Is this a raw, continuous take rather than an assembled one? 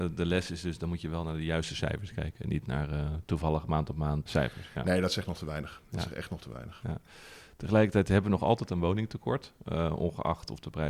no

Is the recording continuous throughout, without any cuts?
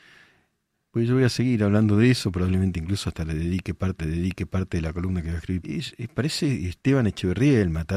no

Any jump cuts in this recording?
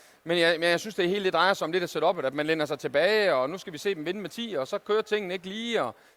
no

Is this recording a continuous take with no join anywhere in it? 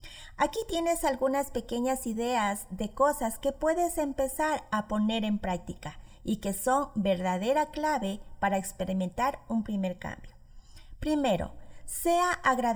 yes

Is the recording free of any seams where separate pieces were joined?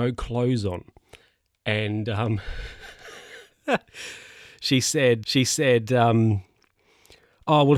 no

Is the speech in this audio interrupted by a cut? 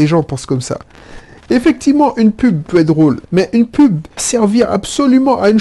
yes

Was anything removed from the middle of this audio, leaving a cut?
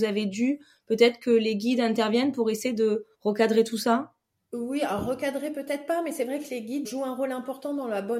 yes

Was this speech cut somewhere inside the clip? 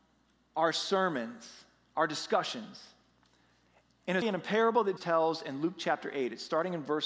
yes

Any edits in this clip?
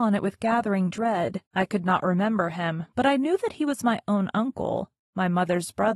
yes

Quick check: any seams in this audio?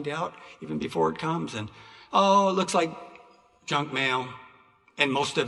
no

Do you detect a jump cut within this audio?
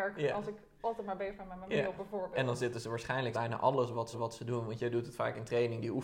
yes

